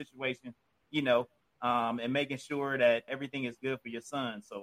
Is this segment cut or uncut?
cut